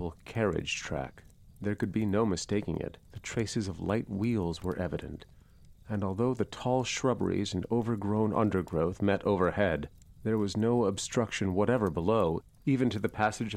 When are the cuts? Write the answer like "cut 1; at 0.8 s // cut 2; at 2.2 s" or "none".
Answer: cut 1; at 1.5 s // cut 2; at 3.0 s // cut 3; at 10.2 s